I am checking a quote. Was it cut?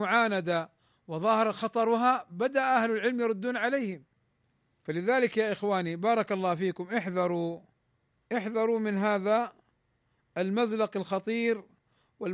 no; 0 cuts

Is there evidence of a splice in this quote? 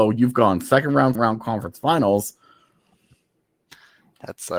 yes; 1 cut; at 1.1 s

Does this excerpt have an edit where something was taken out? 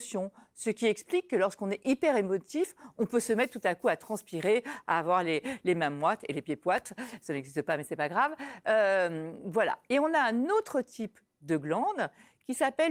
no; 0 cuts

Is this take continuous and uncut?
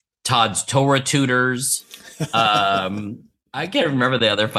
no; 1 cut; at 3.3 s

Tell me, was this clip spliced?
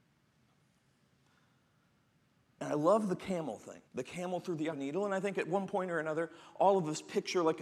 yes; 2 cuts; at 3.9 s, 4.7 s

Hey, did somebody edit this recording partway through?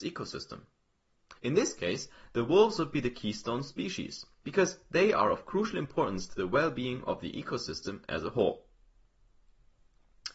yes; 1 cut; at 1.4 s

